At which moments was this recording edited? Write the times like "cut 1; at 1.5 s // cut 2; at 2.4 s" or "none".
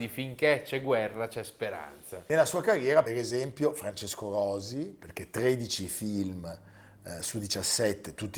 cut 1; at 3.1 s